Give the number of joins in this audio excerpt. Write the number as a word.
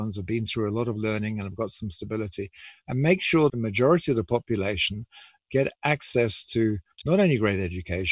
one